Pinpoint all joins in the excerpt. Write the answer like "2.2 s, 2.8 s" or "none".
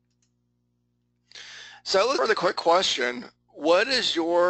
2.2 s